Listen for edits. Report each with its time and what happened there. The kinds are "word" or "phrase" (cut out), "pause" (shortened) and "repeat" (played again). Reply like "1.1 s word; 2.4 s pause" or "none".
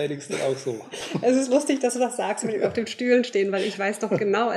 none